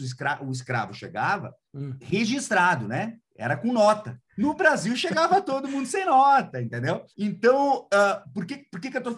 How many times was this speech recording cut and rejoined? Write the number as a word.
three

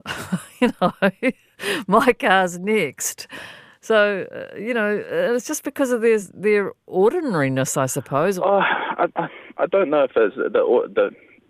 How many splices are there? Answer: zero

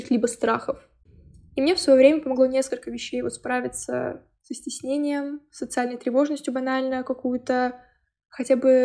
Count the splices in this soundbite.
zero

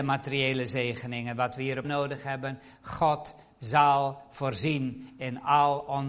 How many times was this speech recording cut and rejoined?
one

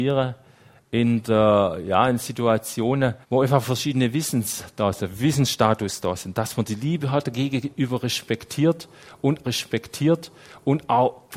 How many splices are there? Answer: two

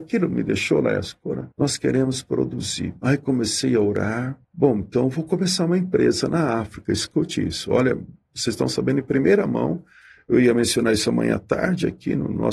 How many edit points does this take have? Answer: two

